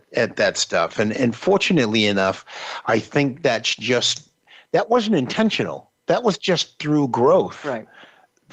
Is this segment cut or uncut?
uncut